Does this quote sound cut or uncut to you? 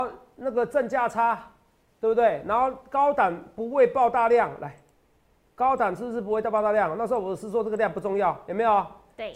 uncut